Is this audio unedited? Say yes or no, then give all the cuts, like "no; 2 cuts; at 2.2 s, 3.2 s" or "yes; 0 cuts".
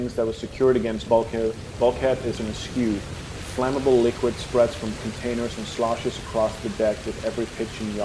no; 4 cuts; at 1.1 s, 1.7 s, 2.4 s, 5.0 s